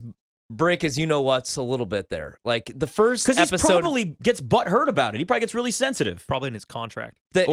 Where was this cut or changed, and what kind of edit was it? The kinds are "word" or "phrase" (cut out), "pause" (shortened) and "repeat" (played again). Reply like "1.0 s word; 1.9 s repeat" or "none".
none